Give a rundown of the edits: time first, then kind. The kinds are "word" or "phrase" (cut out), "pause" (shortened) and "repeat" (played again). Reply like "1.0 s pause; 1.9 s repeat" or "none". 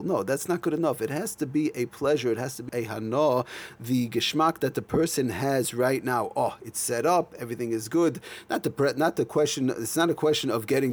2.7 s word